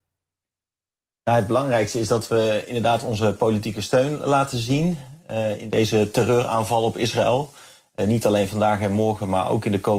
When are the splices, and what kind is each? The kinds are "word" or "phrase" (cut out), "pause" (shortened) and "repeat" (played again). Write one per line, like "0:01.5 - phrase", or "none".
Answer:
none